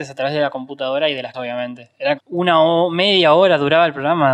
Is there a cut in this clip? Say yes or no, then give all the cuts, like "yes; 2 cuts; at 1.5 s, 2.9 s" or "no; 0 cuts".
yes; 2 cuts; at 1.3 s, 2.2 s